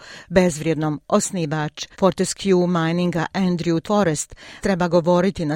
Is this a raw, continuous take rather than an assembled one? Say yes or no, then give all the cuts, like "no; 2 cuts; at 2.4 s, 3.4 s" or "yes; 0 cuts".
no; 3 cuts; at 1.9 s, 3.8 s, 4.6 s